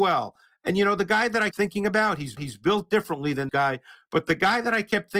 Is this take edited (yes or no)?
yes